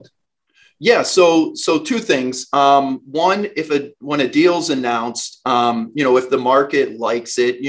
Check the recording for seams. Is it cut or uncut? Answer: uncut